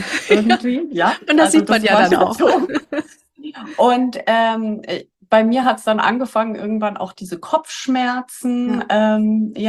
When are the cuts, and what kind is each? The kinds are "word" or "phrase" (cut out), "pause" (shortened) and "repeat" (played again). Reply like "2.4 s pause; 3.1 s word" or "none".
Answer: none